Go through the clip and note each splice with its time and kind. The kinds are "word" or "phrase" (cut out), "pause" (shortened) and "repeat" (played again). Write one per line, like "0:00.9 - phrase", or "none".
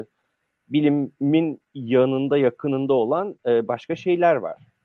none